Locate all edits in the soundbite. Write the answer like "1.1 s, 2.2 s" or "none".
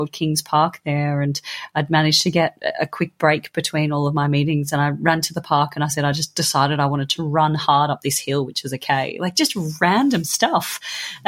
none